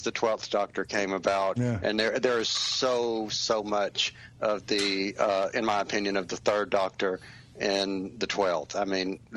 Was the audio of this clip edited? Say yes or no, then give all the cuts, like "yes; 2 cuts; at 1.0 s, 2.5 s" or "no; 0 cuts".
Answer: no; 0 cuts